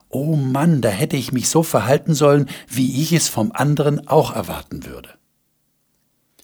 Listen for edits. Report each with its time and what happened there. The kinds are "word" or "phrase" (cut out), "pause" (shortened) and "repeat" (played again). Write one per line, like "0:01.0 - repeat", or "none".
none